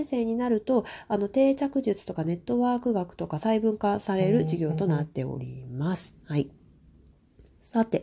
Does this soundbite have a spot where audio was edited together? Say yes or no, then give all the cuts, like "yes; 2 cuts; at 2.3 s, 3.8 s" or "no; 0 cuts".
yes; 1 cut; at 6.2 s